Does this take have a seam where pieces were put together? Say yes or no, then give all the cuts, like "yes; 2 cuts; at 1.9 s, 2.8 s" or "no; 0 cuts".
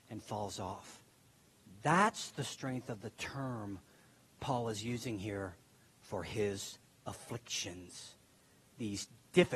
no; 0 cuts